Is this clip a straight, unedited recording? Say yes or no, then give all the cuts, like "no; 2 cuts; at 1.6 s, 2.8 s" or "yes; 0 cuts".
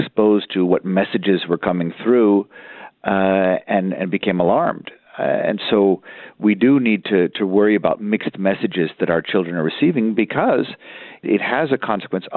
no; 1 cut; at 11.2 s